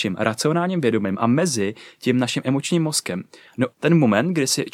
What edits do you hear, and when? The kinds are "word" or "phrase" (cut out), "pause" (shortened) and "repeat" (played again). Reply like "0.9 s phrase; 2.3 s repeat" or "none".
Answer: 3.7 s word